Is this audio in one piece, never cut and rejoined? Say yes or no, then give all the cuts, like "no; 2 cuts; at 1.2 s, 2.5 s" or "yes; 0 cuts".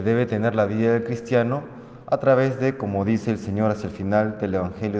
yes; 0 cuts